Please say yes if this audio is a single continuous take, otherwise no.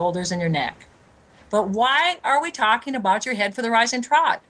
no